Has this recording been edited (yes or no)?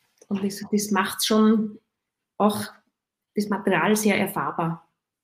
no